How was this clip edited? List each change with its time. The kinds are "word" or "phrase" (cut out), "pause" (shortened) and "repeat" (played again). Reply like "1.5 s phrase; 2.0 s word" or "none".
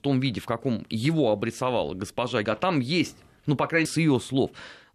2.4 s word; 3.8 s word